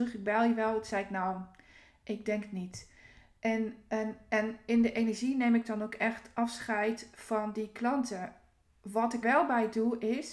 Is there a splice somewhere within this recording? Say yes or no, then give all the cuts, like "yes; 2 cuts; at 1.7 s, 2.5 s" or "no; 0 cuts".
yes; 1 cut; at 9.2 s